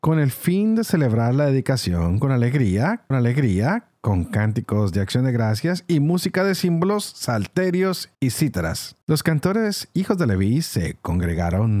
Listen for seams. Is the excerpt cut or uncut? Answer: cut